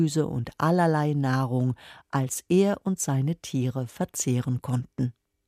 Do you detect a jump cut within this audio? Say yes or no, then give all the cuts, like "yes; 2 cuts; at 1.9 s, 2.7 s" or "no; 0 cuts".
no; 0 cuts